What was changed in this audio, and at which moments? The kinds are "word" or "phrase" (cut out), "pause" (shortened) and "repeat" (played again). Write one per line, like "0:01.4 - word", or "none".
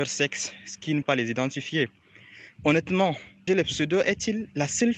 0:01.0 - word
0:03.5 - word